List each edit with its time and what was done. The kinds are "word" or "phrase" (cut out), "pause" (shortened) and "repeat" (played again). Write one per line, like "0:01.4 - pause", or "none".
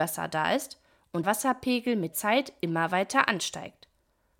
0:01.2 - word
0:02.1 - word